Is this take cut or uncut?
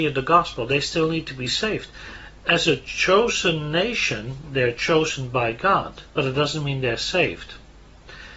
cut